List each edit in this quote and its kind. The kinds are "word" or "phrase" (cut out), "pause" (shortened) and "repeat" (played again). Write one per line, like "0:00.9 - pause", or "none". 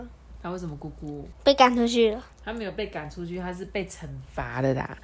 0:01.3 - pause
0:02.3 - pause